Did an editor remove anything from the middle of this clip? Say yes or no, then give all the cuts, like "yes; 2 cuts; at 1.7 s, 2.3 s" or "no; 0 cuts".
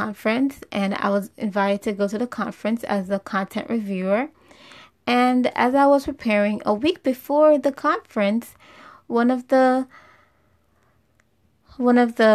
no; 0 cuts